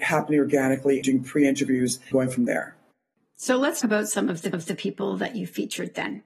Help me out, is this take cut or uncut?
cut